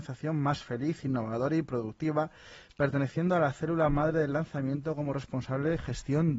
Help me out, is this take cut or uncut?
uncut